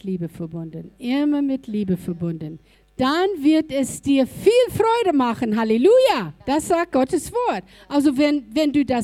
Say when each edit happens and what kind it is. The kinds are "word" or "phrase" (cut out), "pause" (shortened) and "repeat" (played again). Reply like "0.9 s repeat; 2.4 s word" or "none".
2.7 s pause; 6.4 s pause